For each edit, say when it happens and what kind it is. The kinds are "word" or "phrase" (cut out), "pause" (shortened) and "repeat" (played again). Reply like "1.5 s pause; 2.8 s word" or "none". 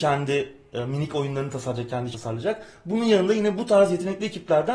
2.1 s word